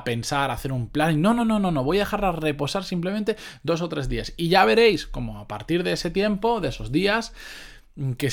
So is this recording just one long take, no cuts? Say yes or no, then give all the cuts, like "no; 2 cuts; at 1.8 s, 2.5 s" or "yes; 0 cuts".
yes; 0 cuts